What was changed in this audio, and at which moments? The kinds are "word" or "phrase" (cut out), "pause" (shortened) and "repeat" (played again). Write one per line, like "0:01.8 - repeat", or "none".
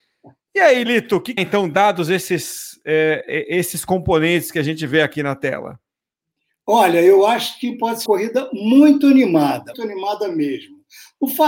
0:01.4 - phrase
0:08.1 - phrase
0:09.7 - word